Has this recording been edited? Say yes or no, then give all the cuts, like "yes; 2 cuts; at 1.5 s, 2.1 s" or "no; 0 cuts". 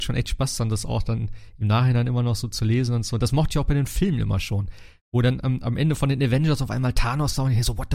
no; 0 cuts